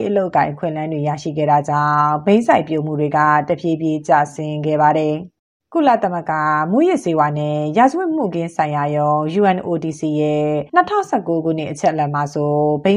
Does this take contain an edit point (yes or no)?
yes